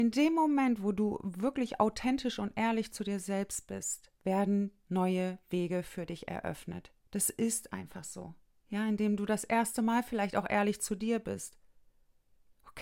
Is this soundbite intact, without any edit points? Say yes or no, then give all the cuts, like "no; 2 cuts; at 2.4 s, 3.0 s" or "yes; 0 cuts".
no; 3 cuts; at 4.2 s, 7.0 s, 8.5 s